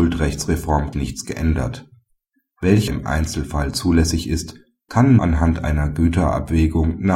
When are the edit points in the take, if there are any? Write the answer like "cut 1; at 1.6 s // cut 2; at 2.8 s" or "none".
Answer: cut 1; at 0.9 s // cut 2; at 2.9 s // cut 3; at 5.2 s